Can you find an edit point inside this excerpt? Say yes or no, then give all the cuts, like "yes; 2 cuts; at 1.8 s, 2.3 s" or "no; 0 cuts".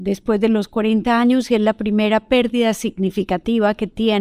no; 0 cuts